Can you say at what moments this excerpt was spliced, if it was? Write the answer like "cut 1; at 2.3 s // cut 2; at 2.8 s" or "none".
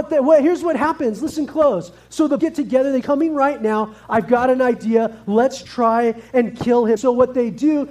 cut 1; at 2.4 s // cut 2; at 3.0 s // cut 3; at 5.6 s // cut 4; at 7.0 s